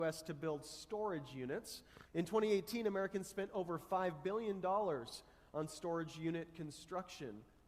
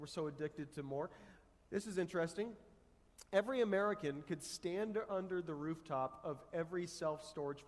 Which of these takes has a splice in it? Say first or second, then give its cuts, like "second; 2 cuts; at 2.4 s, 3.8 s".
first; 1 cut; at 2.1 s